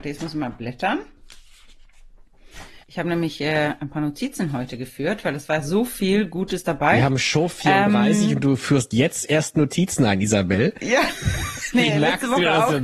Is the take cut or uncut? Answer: cut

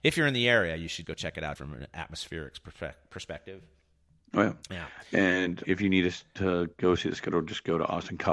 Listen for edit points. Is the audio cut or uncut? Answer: cut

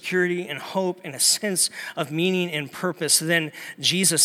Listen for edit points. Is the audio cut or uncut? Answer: uncut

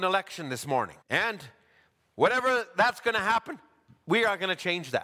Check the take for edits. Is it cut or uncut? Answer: cut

